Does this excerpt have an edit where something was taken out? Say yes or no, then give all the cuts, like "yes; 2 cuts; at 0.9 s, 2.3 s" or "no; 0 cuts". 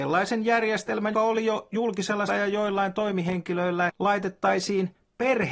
yes; 3 cuts; at 1.1 s, 2.3 s, 3.9 s